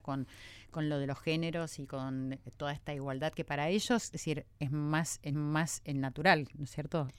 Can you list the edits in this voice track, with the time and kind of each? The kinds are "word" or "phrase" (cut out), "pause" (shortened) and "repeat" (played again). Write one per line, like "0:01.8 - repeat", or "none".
0:05.3 - repeat